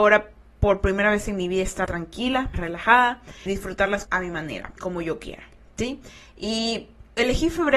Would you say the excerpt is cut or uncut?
cut